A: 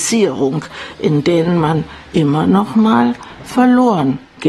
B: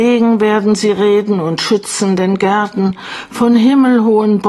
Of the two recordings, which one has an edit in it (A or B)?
A